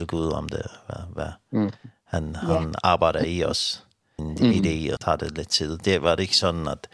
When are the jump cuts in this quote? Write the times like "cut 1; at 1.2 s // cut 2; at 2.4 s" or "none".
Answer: cut 1; at 4.2 s // cut 2; at 5.0 s